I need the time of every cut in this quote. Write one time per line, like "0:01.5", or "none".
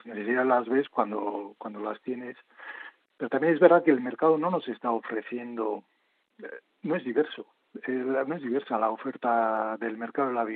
none